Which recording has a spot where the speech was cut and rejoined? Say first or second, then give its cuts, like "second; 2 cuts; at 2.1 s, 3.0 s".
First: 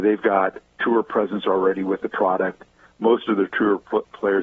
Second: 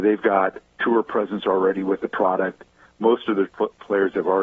second; 1 cut; at 3.5 s